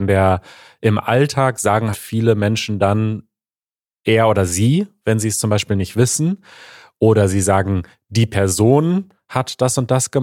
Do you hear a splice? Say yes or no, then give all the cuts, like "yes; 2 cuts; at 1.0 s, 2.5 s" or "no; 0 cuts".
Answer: yes; 1 cut; at 1.9 s